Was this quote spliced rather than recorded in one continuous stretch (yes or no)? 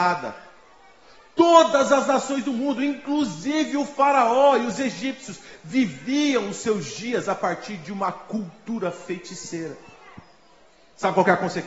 no